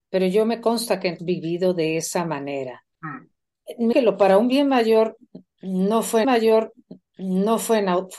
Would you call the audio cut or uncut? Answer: cut